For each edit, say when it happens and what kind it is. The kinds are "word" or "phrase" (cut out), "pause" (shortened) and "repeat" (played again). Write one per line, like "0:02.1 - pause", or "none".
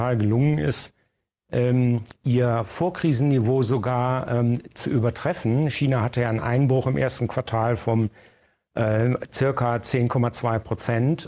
none